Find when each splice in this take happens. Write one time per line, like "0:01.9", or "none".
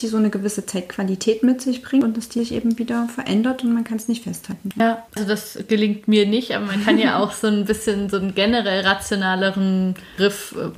0:05.1